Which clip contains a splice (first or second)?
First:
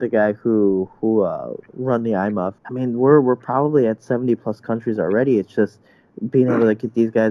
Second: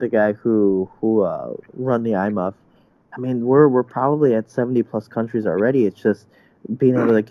first